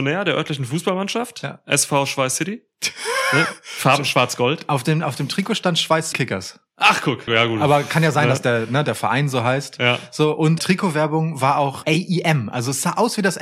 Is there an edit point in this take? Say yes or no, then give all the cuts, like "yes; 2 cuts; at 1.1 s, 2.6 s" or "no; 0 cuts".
yes; 4 cuts; at 6.1 s, 7.3 s, 10.6 s, 11.8 s